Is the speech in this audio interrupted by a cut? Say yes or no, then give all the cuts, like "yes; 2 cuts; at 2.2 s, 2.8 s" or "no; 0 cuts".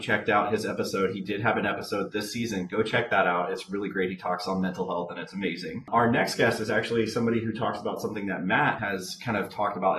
no; 0 cuts